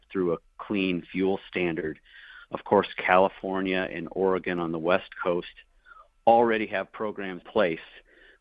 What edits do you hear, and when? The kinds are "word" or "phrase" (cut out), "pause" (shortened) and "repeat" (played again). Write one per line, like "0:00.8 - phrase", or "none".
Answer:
0:07.4 - word